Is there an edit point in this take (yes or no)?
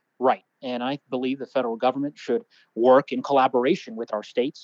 no